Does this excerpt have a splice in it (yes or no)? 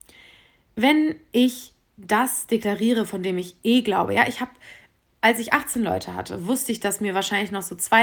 no